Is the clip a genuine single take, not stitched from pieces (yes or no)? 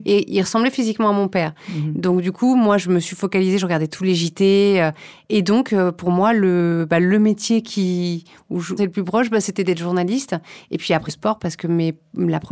no